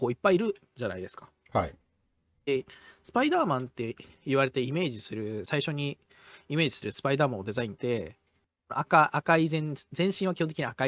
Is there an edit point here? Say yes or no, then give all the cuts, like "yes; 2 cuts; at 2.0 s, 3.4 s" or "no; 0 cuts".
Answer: no; 0 cuts